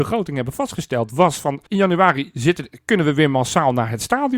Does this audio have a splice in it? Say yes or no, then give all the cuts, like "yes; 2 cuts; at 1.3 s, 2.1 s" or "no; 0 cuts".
yes; 1 cut; at 1.7 s